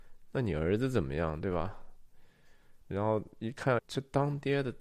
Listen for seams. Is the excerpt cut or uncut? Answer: cut